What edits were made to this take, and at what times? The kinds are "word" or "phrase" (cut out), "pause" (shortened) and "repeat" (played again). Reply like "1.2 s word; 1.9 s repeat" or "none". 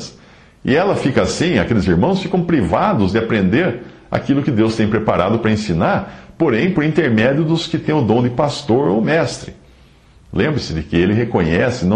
none